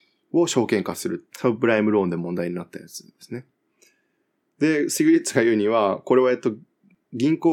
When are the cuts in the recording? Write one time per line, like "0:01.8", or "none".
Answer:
0:01.3